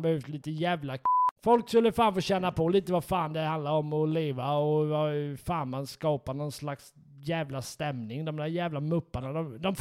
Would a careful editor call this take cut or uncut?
cut